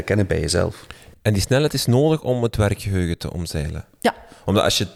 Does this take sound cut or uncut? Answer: uncut